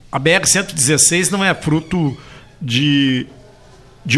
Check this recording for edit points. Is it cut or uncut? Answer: uncut